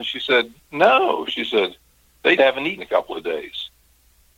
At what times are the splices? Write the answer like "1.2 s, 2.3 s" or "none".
2.4 s, 2.8 s